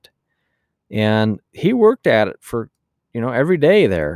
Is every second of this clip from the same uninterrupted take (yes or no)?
yes